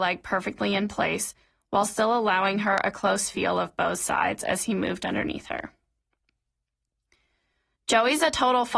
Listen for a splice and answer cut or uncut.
uncut